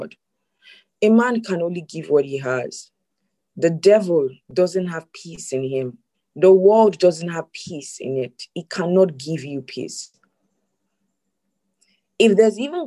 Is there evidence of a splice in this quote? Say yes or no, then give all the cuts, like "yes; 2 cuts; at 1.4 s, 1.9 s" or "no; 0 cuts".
yes; 3 cuts; at 3.1 s, 4.4 s, 6.1 s